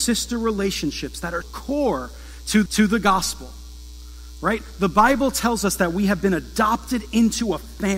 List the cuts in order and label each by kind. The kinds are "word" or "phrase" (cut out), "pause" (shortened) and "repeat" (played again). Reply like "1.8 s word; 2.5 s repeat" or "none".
1.4 s word; 2.7 s repeat